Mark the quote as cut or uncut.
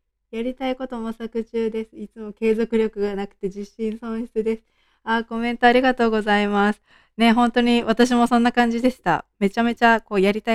uncut